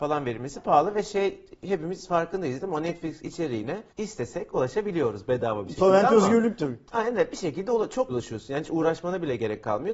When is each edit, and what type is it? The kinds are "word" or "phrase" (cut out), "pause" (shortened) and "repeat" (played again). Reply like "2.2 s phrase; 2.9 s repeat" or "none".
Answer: 3.9 s pause; 8.1 s word